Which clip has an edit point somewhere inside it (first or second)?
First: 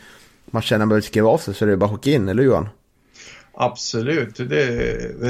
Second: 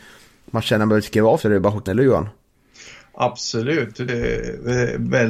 second